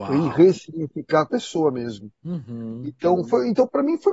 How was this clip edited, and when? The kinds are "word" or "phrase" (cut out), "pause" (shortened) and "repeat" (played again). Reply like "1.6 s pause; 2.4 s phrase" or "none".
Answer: 1.3 s word